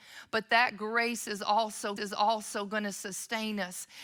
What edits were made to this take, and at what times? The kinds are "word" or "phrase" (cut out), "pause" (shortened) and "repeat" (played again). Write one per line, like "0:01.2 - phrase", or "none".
0:02.0 - repeat

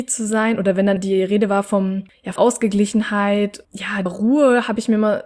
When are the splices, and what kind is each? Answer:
0:01.0 - word
0:02.4 - word
0:03.6 - word
0:04.1 - word

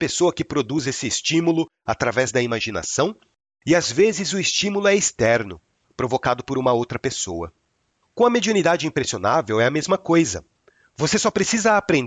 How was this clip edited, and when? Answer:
none

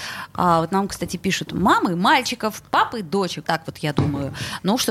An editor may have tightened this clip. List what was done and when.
0:01.5 - word
0:03.4 - word

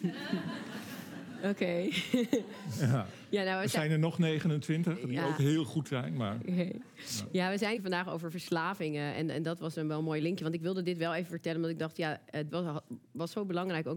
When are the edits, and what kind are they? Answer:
0:07.8 - phrase
0:12.5 - word

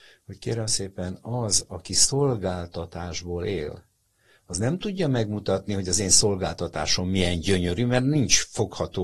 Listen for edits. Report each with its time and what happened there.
none

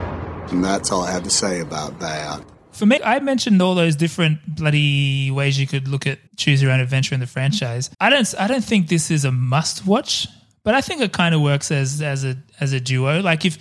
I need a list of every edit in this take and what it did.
0:02.5 - pause
0:03.0 - word
0:06.3 - pause
0:07.9 - pause

